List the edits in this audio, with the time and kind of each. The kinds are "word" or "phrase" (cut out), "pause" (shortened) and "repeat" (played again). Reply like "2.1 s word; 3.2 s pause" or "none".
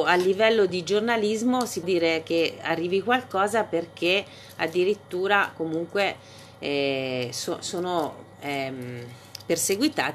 1.8 s word; 8.3 s pause